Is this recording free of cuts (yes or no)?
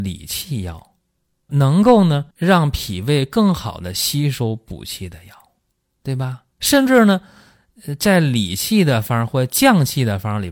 no